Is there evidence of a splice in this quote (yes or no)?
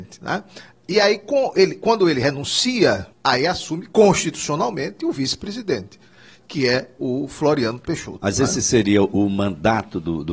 yes